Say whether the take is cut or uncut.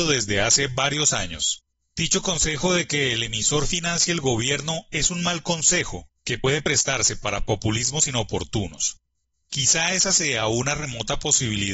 uncut